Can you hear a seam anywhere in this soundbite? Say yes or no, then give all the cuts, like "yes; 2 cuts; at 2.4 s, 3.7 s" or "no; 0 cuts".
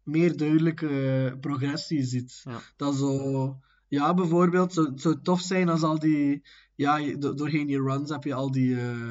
no; 0 cuts